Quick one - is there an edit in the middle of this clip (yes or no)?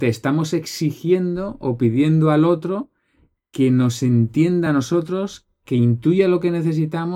no